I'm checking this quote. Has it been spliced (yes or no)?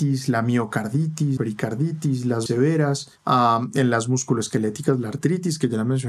yes